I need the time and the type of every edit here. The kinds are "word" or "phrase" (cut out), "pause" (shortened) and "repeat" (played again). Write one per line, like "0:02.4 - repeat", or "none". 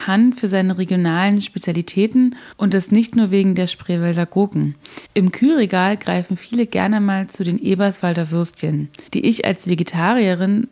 0:02.5 - pause
0:05.1 - pause
0:09.1 - pause